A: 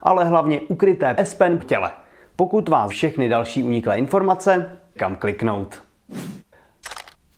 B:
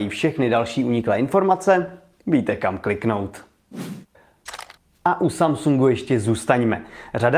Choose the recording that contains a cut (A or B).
A